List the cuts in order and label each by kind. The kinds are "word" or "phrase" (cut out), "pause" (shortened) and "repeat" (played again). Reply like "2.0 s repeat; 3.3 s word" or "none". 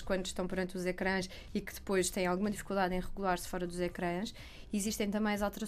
none